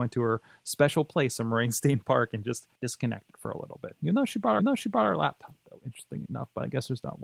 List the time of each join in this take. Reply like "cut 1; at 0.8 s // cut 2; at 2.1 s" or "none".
cut 1; at 2.8 s // cut 2; at 4.6 s